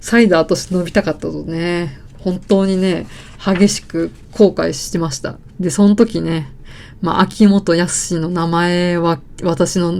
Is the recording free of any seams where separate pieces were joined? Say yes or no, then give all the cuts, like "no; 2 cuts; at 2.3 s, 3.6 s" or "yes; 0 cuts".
no; 1 cut; at 5.5 s